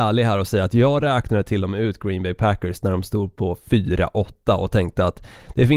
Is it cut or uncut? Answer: uncut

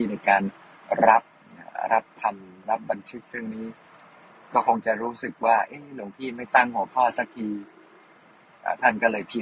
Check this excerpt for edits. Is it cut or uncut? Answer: uncut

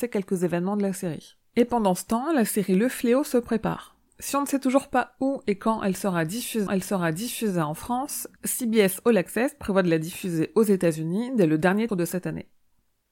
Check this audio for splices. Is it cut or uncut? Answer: cut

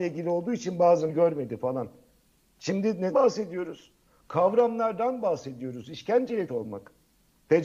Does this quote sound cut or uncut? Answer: cut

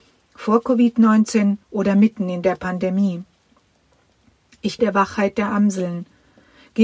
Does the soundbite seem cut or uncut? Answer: cut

